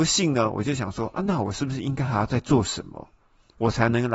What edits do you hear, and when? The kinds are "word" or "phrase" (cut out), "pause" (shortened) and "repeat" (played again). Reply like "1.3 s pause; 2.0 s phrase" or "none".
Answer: none